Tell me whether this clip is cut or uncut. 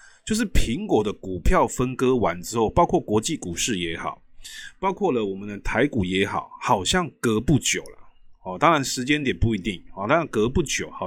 uncut